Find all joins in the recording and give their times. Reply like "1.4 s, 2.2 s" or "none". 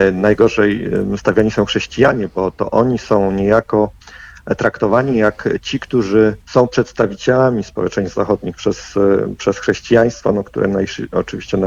6.4 s